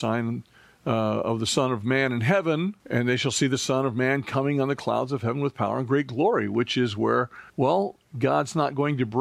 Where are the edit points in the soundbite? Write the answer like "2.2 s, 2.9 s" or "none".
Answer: 2.8 s, 7.5 s